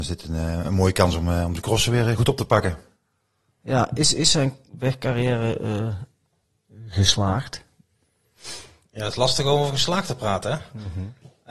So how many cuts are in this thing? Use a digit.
1